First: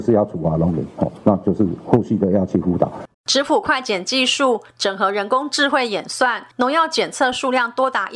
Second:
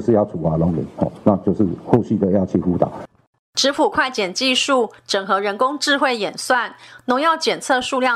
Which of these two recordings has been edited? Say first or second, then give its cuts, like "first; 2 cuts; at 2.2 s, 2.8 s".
first; 2 cuts; at 3.1 s, 6.5 s